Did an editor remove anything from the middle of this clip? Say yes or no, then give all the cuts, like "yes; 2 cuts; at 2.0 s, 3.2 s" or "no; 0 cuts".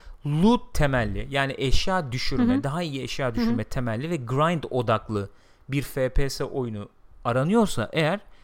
no; 0 cuts